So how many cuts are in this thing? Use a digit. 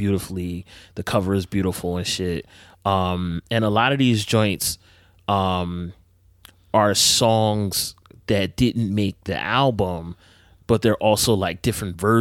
0